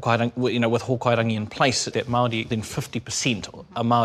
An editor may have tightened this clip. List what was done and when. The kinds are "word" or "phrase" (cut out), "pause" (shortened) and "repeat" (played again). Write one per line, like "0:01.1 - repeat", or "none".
0:01.9 - word
0:02.5 - word